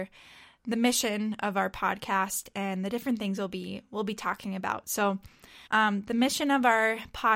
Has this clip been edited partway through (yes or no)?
yes